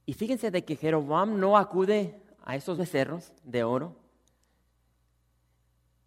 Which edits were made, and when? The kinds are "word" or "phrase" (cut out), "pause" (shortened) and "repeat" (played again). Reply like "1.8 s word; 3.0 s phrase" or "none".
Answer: 2.8 s word